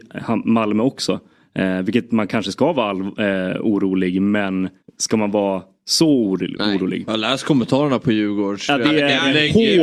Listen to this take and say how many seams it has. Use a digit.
1